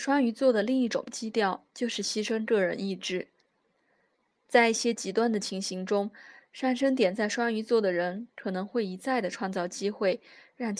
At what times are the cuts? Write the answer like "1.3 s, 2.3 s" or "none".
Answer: 1.7 s